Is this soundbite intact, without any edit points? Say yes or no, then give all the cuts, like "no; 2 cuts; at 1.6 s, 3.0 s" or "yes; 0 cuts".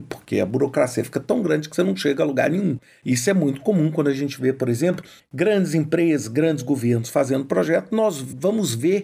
yes; 0 cuts